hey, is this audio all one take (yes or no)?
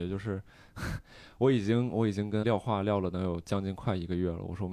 no